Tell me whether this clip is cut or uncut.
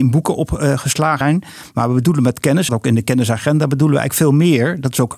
cut